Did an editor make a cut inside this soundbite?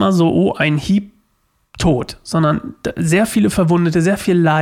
no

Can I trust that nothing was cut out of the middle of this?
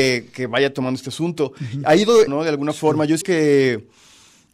no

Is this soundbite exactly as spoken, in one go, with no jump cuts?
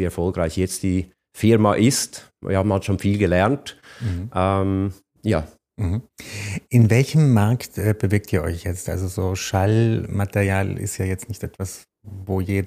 yes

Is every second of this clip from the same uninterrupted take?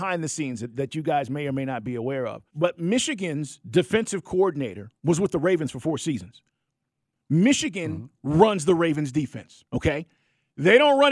no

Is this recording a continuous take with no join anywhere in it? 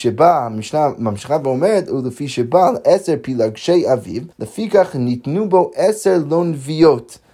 no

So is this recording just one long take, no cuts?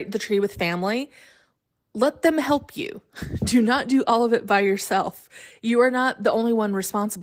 yes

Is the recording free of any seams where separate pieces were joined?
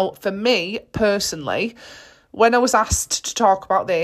yes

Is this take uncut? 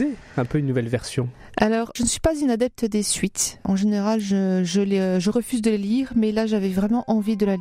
yes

